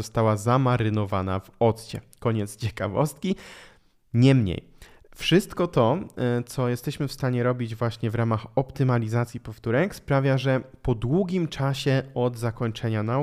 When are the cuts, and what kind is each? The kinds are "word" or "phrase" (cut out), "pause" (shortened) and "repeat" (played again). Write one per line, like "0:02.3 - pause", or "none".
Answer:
none